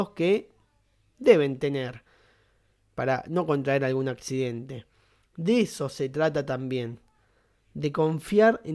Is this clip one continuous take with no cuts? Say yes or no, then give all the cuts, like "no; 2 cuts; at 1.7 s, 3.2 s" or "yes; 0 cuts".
yes; 0 cuts